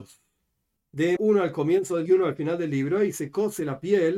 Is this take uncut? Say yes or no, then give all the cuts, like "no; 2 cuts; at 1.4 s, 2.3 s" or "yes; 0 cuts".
no; 2 cuts; at 1.2 s, 2.1 s